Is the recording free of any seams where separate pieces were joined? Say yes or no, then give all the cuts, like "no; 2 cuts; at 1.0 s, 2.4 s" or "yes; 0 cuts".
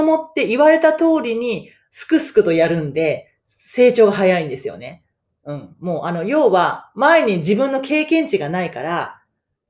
yes; 0 cuts